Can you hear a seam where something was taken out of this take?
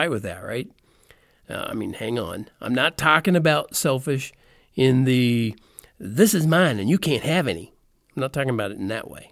no; 0 cuts

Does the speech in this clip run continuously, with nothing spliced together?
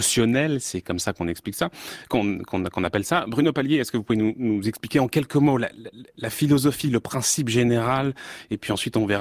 yes; 0 cuts

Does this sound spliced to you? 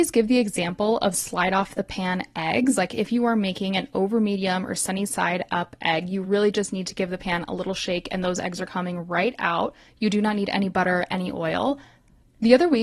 no; 0 cuts

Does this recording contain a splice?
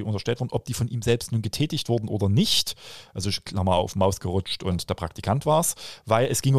no; 0 cuts

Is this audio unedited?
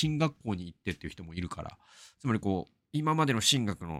yes; 0 cuts

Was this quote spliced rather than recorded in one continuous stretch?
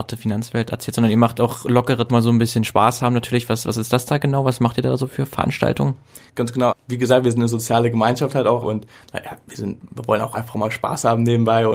yes; 4 cuts; at 2.1 s, 6.3 s, 6.7 s, 8.6 s

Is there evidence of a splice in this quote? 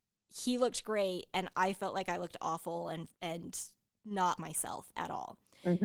yes; 2 cuts; at 3.1 s, 4.4 s

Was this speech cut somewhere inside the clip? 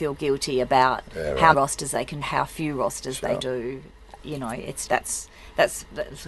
yes; 4 cuts; at 1.5 s, 2.2 s, 3.4 s, 4.9 s

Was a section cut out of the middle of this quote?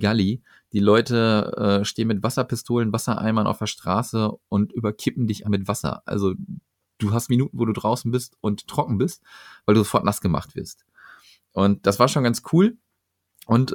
yes; 2 cuts; at 5.4 s, 7.3 s

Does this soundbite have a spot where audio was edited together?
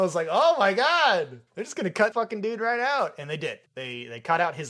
yes; 3 cuts; at 1.5 s, 2.1 s, 3.7 s

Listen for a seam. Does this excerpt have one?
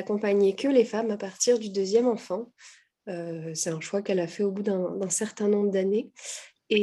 no; 0 cuts

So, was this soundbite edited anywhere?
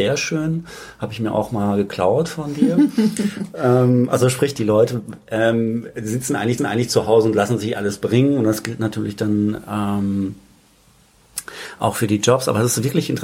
yes; 1 cut; at 6.6 s

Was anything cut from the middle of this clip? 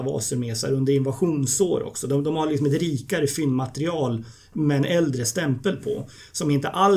yes; 1 cut; at 2.2 s

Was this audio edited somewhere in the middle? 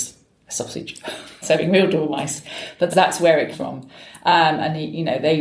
yes; 3 cuts; at 1.4 s, 2.9 s, 3.5 s

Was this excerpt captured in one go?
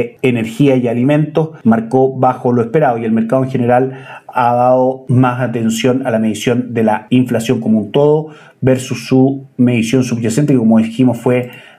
yes; 0 cuts

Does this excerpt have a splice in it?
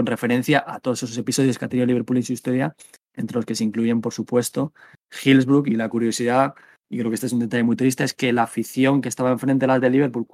no; 0 cuts

